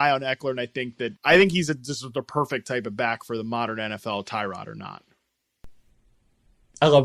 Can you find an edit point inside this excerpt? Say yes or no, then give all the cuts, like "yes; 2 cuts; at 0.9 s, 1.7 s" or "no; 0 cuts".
yes; 1 cut; at 1.2 s